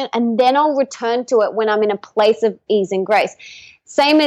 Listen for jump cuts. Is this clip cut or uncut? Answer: uncut